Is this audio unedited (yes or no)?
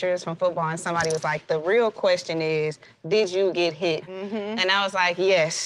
yes